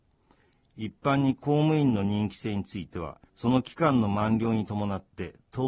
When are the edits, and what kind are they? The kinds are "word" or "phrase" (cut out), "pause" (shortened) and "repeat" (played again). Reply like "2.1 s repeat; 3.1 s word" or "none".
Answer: 3.3 s pause